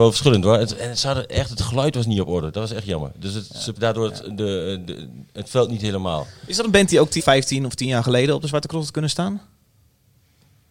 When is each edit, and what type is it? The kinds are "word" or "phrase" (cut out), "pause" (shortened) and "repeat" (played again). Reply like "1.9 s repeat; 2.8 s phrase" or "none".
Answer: 3.8 s word; 7.2 s word